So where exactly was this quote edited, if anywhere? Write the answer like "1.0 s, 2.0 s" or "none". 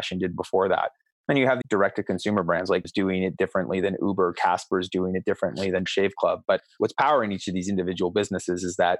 1.6 s, 2.8 s, 5.9 s, 6.8 s

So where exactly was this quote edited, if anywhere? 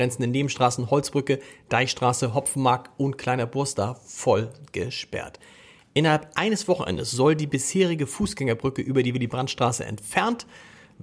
none

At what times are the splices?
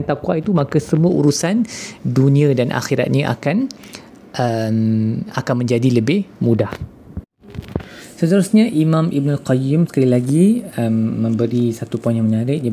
none

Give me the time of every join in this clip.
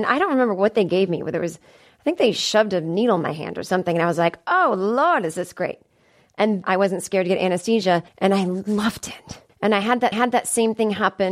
6.6 s, 8.1 s, 9.5 s, 10.1 s

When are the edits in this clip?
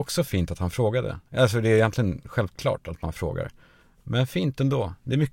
none

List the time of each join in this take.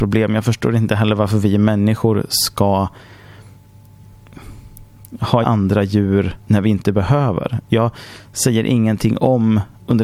5.4 s, 6.4 s

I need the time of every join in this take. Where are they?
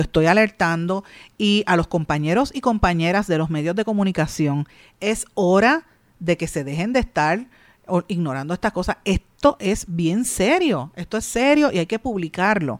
none

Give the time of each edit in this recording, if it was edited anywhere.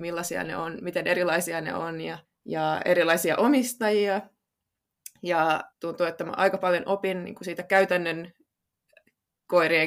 2.2 s, 5.7 s

